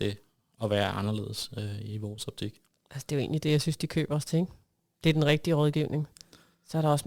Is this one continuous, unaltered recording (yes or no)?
yes